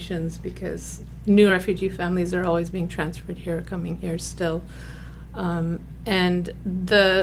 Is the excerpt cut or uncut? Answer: uncut